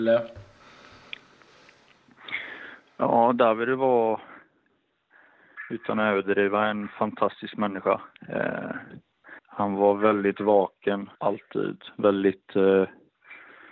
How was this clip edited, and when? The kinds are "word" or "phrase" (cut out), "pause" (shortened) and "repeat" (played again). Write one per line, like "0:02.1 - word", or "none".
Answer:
0:09.4 - pause
0:11.1 - pause